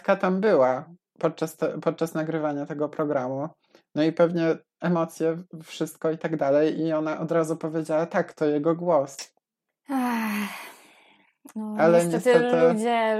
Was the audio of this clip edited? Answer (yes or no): no